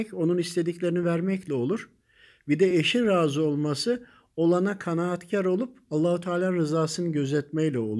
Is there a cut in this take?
no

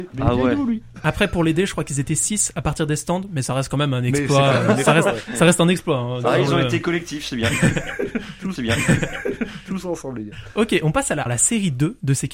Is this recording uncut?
no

